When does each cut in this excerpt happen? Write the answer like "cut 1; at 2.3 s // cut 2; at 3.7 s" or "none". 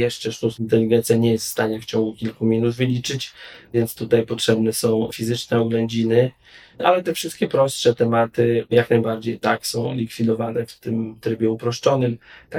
none